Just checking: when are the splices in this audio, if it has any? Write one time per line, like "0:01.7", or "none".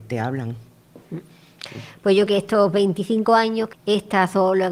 0:02.3
0:03.7